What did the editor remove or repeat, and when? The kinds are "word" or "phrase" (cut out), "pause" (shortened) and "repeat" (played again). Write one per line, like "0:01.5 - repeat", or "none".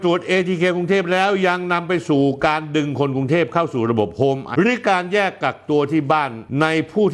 0:04.5 - word